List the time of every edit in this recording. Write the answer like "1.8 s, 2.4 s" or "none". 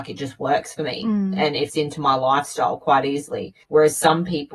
1.7 s, 3.6 s